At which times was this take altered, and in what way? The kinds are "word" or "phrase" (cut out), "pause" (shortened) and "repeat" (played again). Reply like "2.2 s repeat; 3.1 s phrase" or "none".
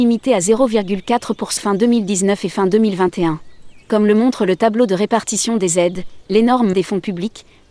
1.6 s word; 3.8 s pause; 6.7 s word